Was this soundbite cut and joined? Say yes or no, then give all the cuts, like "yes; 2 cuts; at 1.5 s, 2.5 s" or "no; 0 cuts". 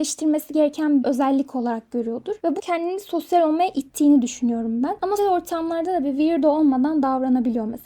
yes; 3 cuts; at 1.0 s, 2.6 s, 5.2 s